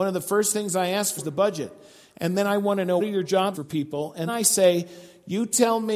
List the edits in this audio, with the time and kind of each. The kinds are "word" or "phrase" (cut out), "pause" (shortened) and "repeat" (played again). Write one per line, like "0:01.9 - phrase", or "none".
0:01.2 - word
0:03.0 - word
0:03.5 - word
0:04.3 - word